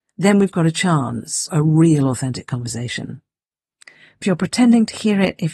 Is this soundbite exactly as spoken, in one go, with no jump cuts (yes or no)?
no